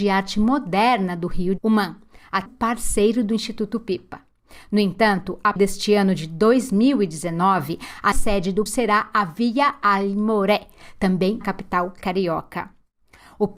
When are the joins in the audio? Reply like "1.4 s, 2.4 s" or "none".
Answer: 1.6 s, 2.5 s, 5.6 s, 8.1 s, 8.7 s, 11.4 s